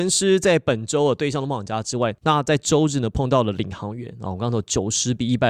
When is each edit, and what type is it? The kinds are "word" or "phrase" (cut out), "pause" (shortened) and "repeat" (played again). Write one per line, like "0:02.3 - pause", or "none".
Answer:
0:02.2 - pause